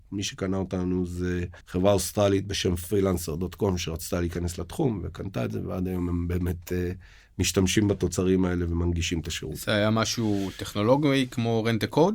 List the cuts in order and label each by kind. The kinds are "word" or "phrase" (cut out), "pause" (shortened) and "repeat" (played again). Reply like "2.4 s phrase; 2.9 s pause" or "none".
1.6 s pause